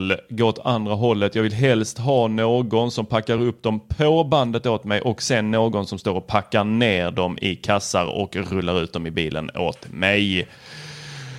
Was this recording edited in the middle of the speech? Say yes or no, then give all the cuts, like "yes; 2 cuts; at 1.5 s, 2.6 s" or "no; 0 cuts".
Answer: no; 0 cuts